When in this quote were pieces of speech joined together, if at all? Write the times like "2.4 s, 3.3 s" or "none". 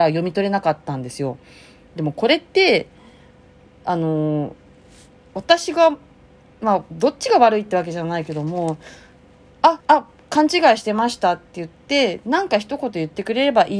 9.8 s